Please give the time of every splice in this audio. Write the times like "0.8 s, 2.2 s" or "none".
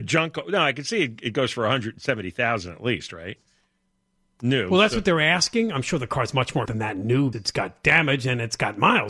6.7 s, 7.3 s